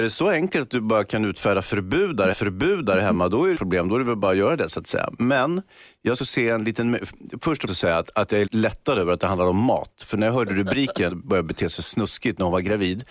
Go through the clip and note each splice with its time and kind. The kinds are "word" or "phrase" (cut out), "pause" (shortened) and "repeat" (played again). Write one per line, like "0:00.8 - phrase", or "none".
0:02.3 - repeat
0:03.6 - phrase
0:06.2 - phrase
0:07.7 - phrase
0:08.5 - word
0:11.1 - phrase